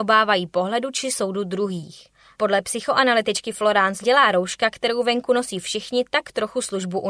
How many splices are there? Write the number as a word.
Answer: one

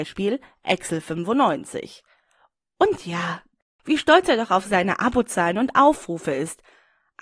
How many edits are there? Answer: zero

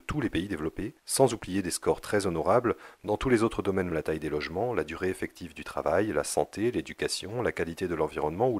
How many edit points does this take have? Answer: two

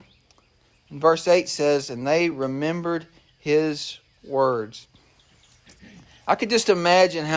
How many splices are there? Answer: zero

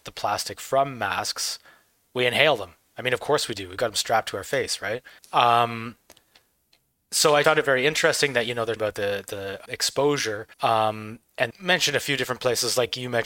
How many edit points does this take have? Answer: six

